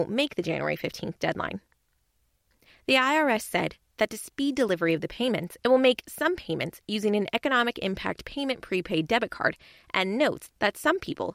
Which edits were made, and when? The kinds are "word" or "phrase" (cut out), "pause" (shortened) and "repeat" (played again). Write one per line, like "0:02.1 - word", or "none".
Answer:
none